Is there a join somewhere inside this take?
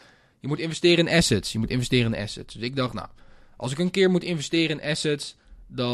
no; 0 cuts

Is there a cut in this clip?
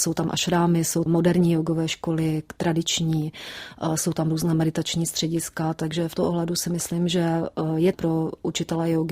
yes; 3 cuts; at 1.1 s, 6.2 s, 7.9 s

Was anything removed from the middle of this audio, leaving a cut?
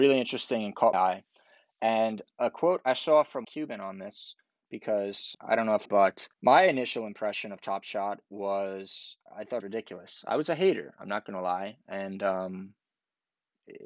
yes; 7 cuts; at 0.9 s, 3.4 s, 5.3 s, 5.8 s, 6.3 s, 9.3 s, 9.6 s

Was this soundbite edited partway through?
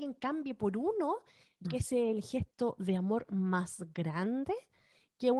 yes; 1 cut; at 1.6 s

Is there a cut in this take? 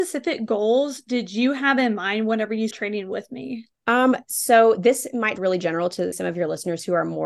yes; 4 cuts; at 2.7 s, 3.7 s, 5.4 s, 6.1 s

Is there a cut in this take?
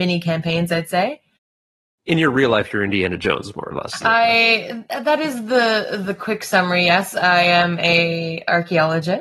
no; 0 cuts

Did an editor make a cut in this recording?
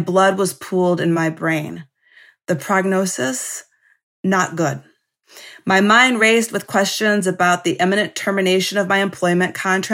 no; 0 cuts

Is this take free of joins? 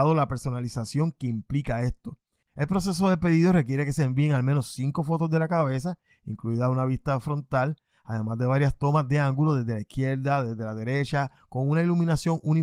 yes; 0 cuts

